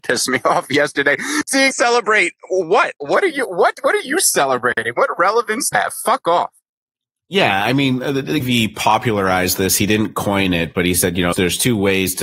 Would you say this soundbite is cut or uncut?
cut